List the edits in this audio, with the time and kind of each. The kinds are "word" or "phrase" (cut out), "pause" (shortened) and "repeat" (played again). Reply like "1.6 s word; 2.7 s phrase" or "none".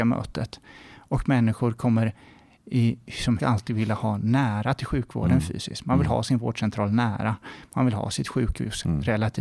3.4 s word